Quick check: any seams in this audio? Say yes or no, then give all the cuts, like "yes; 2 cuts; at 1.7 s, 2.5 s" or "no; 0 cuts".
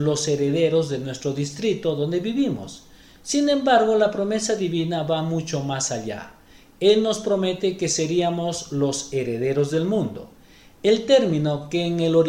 no; 0 cuts